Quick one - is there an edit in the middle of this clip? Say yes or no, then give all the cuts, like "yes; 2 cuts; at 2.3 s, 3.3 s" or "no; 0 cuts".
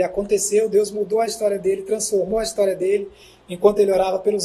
no; 0 cuts